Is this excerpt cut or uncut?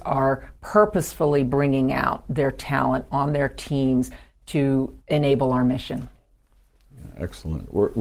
cut